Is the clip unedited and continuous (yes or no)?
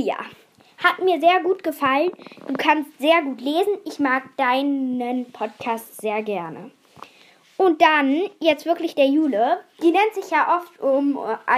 yes